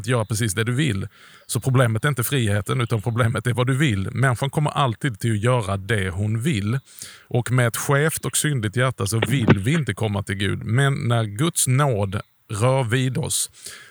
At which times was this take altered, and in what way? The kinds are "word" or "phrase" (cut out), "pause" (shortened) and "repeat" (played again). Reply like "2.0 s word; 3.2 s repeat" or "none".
none